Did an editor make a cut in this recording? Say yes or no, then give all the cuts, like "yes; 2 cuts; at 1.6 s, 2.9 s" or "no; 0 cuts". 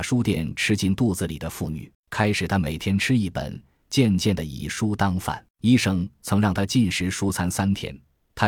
yes; 2 cuts; at 1.9 s, 5.5 s